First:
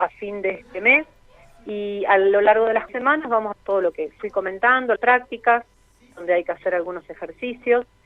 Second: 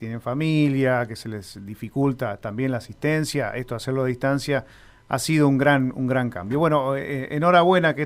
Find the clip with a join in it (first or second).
first